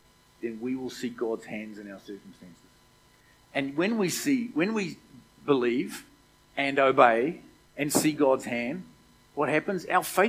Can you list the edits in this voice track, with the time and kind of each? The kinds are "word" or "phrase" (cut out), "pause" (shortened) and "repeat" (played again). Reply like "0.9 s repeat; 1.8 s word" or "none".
3.1 s pause; 7.7 s pause